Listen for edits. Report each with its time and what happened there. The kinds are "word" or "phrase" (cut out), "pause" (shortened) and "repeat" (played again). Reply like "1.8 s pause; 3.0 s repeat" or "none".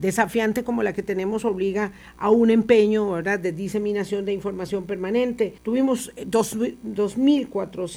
5.6 s pause